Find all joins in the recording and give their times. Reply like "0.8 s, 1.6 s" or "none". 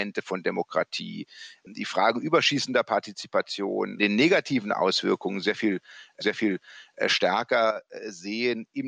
4.0 s, 6.2 s